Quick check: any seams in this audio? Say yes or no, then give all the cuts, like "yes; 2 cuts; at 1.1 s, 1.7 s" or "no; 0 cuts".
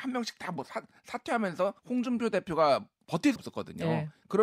yes; 2 cuts; at 1.8 s, 3.4 s